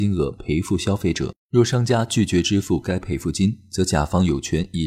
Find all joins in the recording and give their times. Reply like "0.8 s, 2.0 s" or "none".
1.4 s